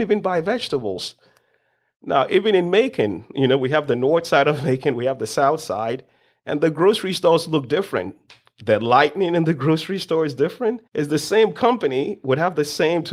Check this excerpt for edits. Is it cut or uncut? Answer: cut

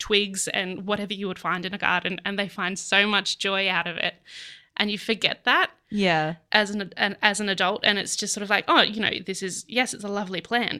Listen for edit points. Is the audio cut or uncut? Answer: uncut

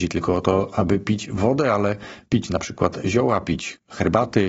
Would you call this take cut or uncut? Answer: uncut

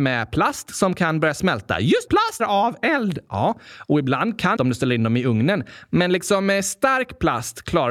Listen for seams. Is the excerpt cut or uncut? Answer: cut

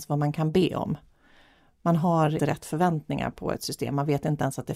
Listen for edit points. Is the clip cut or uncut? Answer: cut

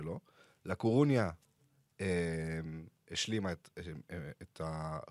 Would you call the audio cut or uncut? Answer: uncut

